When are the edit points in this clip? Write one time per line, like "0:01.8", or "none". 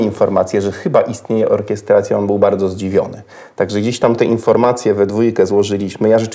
none